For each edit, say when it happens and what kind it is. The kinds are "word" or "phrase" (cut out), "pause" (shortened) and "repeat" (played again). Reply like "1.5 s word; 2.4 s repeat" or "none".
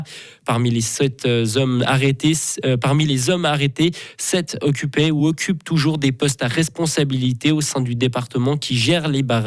none